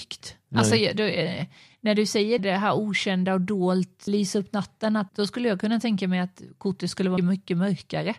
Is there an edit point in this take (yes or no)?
yes